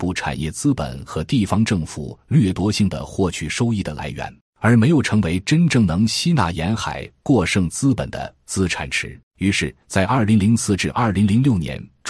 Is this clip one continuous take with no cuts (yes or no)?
no